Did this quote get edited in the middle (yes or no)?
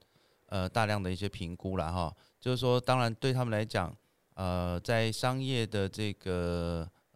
no